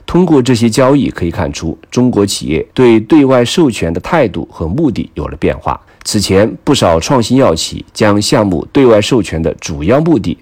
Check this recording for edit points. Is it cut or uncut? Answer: cut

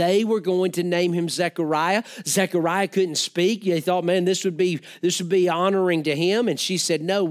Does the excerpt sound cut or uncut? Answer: uncut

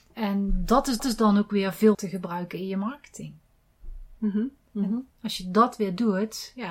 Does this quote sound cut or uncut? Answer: cut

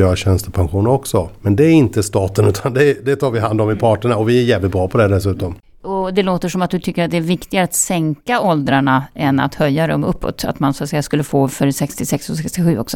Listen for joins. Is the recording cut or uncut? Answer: uncut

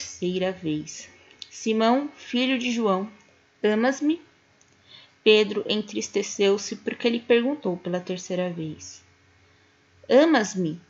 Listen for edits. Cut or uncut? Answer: uncut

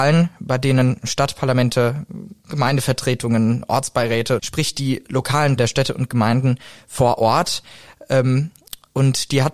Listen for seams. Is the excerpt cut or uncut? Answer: cut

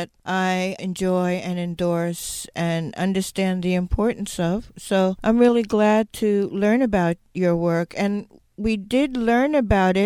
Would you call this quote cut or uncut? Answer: uncut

